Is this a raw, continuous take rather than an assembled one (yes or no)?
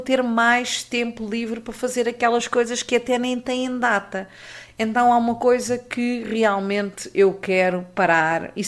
yes